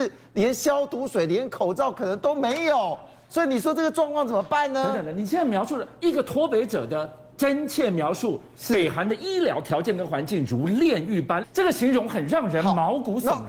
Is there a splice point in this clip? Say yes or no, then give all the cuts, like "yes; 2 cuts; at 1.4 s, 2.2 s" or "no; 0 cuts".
yes; 1 cut; at 11.4 s